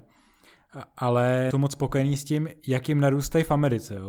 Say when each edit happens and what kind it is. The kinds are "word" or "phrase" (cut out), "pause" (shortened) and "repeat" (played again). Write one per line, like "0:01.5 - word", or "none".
0:01.5 - word